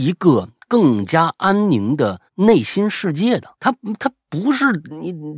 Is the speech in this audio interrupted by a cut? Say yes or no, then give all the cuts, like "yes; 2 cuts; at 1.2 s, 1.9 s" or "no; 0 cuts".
yes; 2 cuts; at 2.3 s, 3.5 s